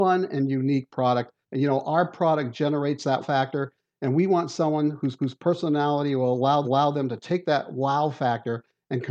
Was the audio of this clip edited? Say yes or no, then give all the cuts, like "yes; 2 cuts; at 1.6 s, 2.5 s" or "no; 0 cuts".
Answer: yes; 4 cuts; at 1.4 s, 3.2 s, 5.2 s, 6.6 s